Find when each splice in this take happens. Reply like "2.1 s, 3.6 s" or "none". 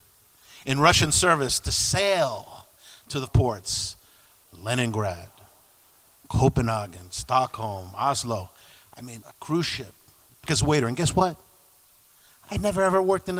3.3 s, 9.2 s, 10.5 s